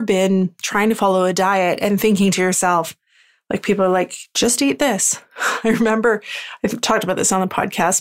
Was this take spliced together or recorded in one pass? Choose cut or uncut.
uncut